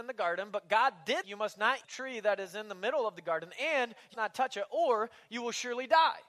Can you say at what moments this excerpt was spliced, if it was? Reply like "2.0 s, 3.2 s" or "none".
1.2 s, 1.8 s, 4.1 s